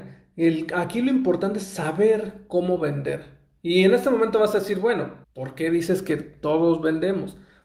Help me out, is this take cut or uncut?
cut